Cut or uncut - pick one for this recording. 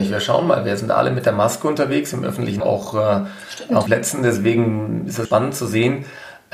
cut